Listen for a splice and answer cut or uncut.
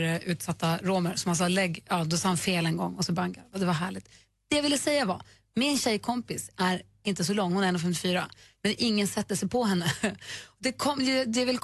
uncut